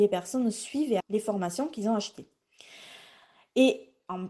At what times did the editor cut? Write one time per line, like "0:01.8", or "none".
0:01.0